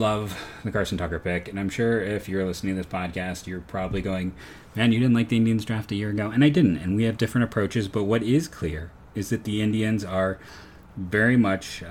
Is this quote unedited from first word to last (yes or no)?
yes